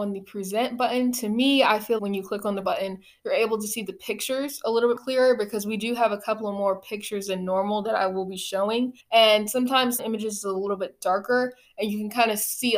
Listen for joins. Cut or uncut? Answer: cut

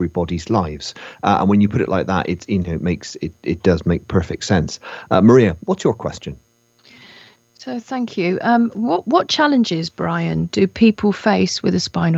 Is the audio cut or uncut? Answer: uncut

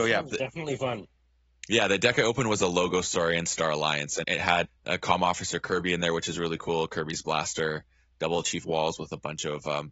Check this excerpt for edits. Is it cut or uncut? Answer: cut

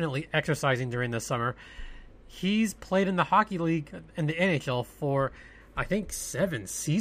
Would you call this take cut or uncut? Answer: uncut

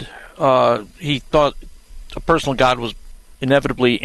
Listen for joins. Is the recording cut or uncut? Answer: uncut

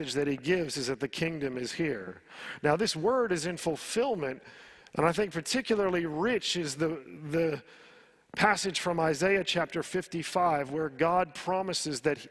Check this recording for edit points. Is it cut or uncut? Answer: uncut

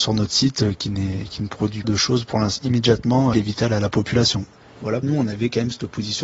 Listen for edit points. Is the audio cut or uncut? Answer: cut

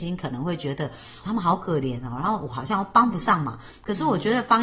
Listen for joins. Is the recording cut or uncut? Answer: cut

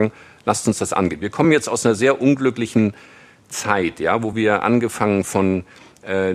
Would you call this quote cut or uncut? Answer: uncut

